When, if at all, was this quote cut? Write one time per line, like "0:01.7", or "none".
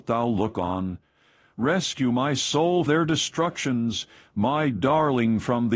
0:02.9

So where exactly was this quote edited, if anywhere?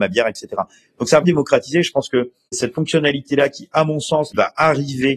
0:01.2

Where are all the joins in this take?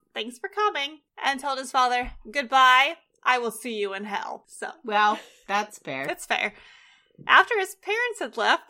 none

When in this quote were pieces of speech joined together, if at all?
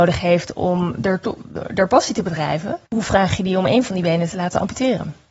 0:02.8

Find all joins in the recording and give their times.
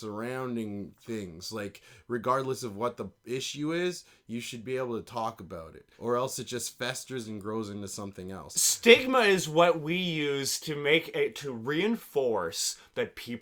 0:05.9

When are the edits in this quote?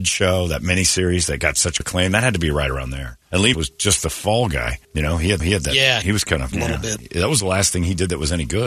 0:01.8
0:03.2
0:03.5
0:04.8
0:05.4
0:06.0
0:06.5

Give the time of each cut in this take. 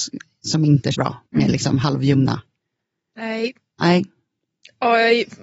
0:00.9
0:01.3

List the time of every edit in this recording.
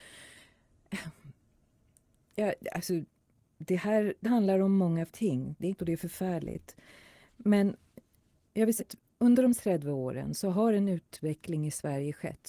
0:04.2
0:05.1
0:05.8
0:08.8
0:09.5

